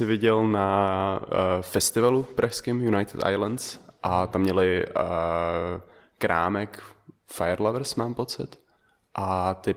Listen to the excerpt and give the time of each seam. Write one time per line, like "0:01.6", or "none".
none